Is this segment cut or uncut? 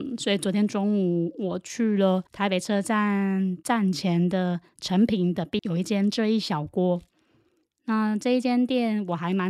cut